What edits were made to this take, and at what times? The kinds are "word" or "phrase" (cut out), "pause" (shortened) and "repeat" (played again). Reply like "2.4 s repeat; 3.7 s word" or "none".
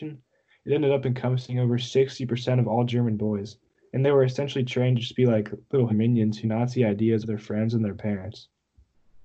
5.9 s word; 6.4 s word; 7.2 s word